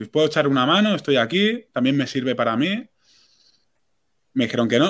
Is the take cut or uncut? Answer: uncut